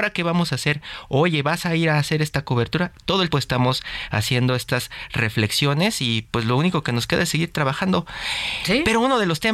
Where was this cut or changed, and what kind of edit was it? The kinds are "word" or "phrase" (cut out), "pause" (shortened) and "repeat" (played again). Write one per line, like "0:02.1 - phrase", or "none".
0:03.3 - word